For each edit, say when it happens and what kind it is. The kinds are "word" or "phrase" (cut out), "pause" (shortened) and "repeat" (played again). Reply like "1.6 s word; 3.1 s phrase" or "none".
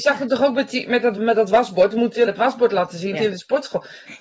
1.1 s word; 2.3 s word; 3.1 s word